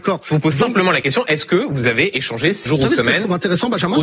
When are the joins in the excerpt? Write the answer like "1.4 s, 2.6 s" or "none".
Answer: 2.7 s